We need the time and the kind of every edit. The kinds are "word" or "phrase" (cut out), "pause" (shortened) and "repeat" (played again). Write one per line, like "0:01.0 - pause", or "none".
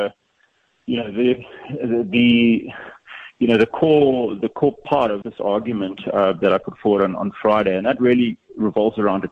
0:05.2 - word